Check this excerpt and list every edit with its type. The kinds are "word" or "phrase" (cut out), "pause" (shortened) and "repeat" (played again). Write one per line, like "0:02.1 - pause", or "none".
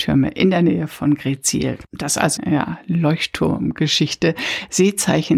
0:01.9 - pause
0:02.4 - phrase